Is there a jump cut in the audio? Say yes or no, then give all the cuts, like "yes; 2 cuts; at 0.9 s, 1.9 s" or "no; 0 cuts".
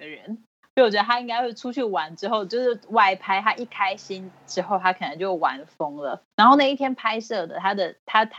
yes; 1 cut; at 6.3 s